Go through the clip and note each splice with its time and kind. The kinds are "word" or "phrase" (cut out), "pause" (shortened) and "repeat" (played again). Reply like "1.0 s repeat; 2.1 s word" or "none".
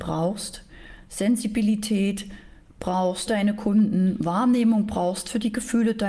3.3 s word